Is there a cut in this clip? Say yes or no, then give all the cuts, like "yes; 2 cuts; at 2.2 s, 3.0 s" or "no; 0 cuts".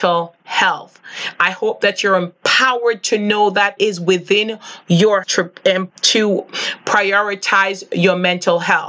yes; 3 cuts; at 3.8 s, 5.2 s, 5.9 s